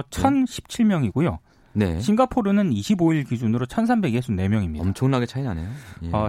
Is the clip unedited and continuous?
yes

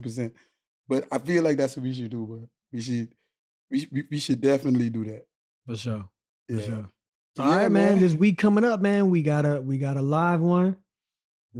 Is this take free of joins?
yes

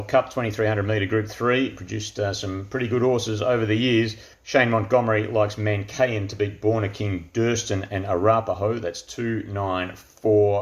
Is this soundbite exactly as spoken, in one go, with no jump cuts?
no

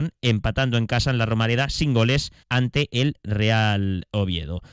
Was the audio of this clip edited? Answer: yes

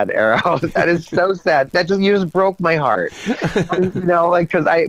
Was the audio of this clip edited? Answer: no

